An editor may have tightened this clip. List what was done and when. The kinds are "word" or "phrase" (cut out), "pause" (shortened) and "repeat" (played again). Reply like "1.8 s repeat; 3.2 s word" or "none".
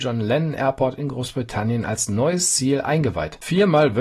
none

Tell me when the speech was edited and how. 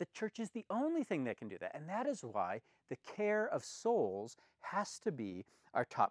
none

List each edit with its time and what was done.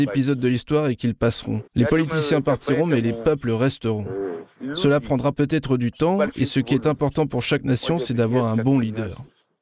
1.7 s pause

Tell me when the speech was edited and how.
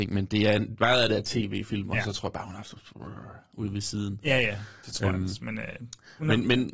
none

